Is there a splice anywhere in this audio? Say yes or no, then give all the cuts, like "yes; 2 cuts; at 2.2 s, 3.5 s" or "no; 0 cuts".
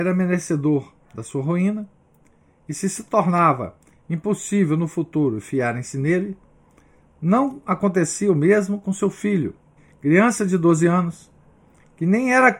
yes; 1 cut; at 9.8 s